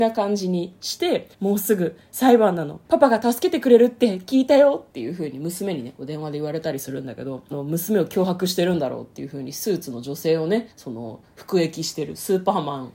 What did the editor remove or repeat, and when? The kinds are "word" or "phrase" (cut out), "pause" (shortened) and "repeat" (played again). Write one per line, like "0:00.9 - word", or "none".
0:01.3 - pause
0:02.8 - pause
0:04.9 - pause
0:07.5 - phrase
0:10.7 - pause